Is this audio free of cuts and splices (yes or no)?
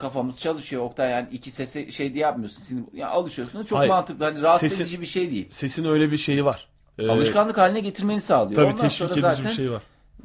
yes